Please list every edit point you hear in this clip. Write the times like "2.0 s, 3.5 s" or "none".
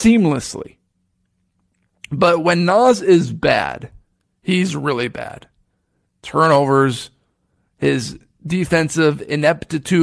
none

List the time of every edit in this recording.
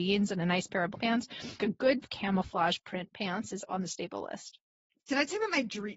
0.9 s, 1.6 s, 2.0 s, 3.7 s

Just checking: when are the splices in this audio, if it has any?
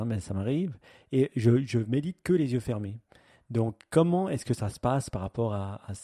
none

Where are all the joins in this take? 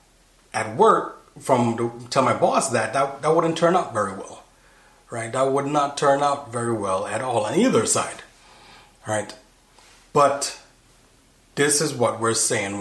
none

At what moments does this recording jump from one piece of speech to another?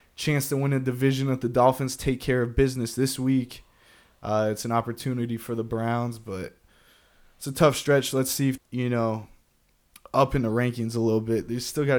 8.6 s

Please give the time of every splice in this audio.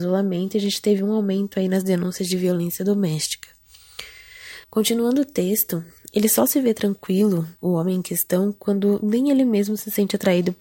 4.6 s, 6.0 s, 7.6 s

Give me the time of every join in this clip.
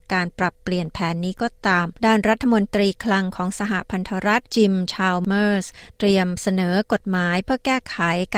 2.0 s

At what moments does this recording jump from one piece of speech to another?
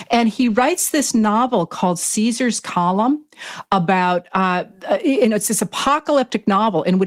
none

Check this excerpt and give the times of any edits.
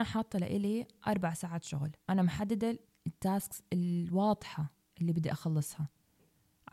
2.0 s, 2.8 s

